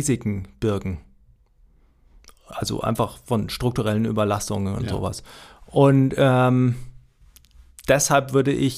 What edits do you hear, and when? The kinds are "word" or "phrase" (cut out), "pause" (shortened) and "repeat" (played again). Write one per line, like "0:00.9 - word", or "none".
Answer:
none